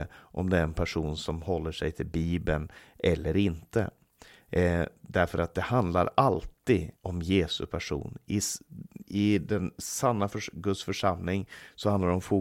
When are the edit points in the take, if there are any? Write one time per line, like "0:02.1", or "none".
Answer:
0:07.0